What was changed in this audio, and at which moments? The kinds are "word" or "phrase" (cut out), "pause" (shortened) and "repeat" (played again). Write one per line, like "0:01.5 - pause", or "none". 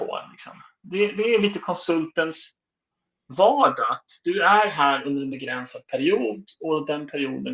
none